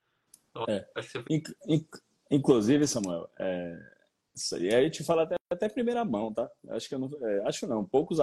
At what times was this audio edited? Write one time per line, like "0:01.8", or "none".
0:05.4